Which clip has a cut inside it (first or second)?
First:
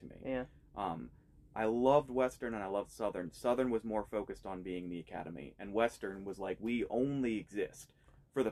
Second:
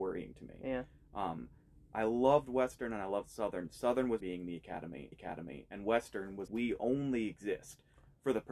second